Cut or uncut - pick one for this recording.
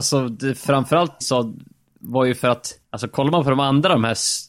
cut